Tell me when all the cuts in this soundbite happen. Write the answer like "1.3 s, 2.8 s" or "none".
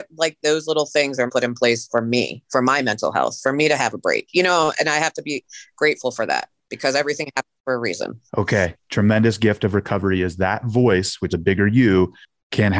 1.3 s, 2.5 s, 8.3 s, 11.3 s